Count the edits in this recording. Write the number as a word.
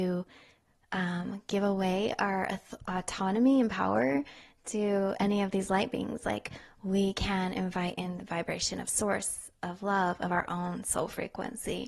zero